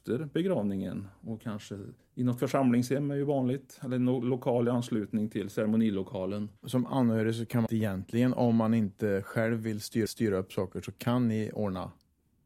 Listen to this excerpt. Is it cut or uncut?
cut